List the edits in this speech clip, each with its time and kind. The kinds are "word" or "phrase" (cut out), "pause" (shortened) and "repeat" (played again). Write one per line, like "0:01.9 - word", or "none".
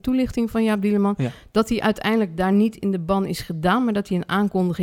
none

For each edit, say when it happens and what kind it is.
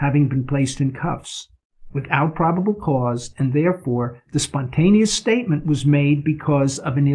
none

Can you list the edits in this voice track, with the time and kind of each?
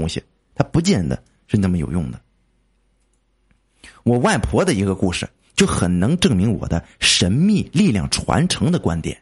none

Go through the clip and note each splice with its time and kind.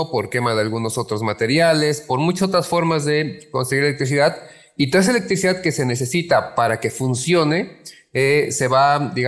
none

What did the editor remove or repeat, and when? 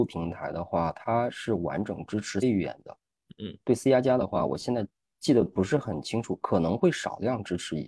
0:02.4 - word

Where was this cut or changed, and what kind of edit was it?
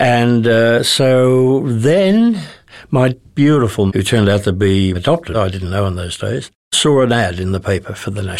0:03.1 - word
0:03.9 - word
0:04.9 - word
0:05.3 - word

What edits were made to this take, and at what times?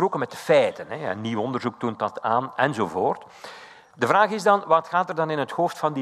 none

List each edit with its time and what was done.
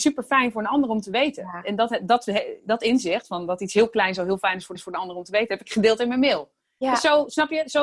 0:04.8 - repeat

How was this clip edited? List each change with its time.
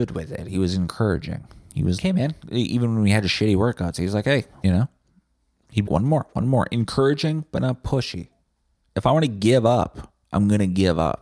0:02.0 - word
0:04.6 - phrase
0:05.9 - word

